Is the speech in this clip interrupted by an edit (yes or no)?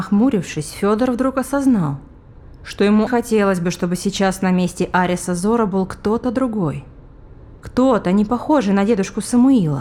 yes